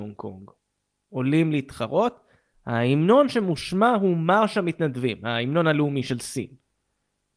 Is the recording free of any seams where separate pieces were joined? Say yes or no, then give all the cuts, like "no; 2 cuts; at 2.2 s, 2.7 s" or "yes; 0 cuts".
yes; 0 cuts